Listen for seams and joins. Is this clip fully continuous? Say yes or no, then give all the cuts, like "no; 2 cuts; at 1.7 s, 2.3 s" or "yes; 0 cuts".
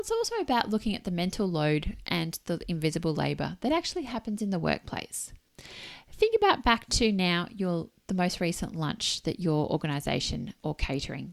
yes; 0 cuts